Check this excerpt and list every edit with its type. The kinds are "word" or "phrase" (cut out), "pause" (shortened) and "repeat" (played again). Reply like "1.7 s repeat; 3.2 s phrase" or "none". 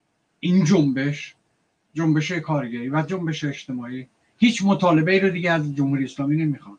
none